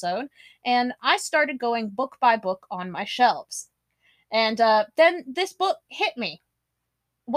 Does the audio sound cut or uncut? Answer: uncut